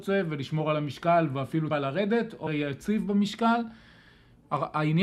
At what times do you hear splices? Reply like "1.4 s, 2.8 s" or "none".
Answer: 1.7 s, 2.5 s

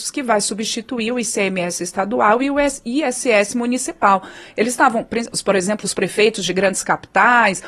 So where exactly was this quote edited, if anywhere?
none

